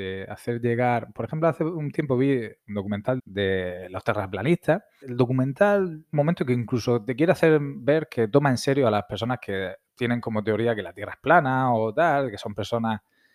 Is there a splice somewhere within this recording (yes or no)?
yes